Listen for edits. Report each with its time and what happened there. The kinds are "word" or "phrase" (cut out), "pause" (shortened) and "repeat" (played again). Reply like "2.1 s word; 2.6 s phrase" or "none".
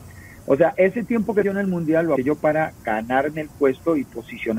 1.4 s phrase; 2.2 s word